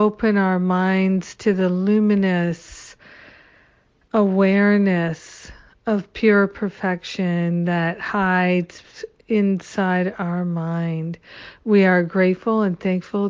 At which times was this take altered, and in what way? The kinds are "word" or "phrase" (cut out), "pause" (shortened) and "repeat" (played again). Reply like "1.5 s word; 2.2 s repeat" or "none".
none